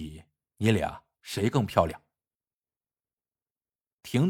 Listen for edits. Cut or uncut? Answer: uncut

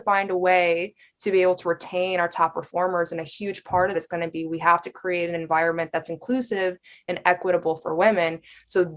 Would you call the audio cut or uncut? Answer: cut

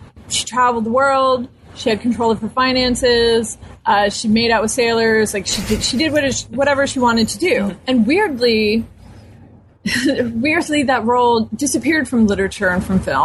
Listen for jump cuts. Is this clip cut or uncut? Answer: uncut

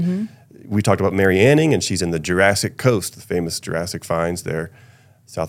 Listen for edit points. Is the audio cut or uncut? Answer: uncut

